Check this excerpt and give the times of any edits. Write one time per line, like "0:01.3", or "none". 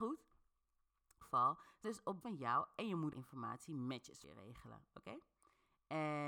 0:01.2
0:01.8
0:02.2
0:03.1
0:04.2